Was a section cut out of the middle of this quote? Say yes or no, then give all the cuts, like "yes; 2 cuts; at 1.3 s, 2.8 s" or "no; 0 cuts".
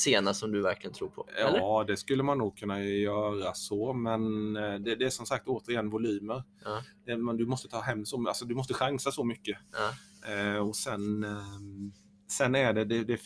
no; 0 cuts